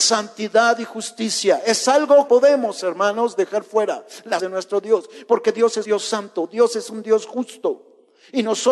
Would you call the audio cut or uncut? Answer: cut